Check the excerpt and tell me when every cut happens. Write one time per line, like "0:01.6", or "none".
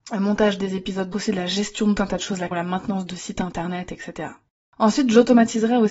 0:01.1
0:02.0
0:02.5